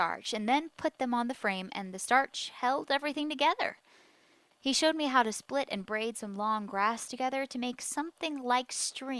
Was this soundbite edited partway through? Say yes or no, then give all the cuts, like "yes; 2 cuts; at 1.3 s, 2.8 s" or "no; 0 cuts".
no; 0 cuts